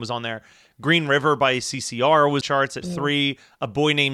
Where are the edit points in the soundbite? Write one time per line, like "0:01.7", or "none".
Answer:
0:02.4
0:02.8